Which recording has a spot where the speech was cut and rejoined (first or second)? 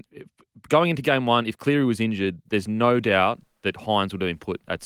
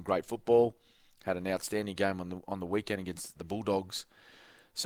second